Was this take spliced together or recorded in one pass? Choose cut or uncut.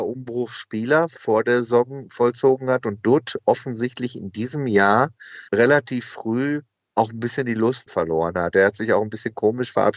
cut